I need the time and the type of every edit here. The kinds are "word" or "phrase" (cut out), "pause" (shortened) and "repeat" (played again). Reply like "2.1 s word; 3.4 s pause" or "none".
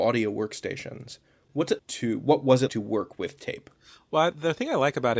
1.8 s word; 2.7 s word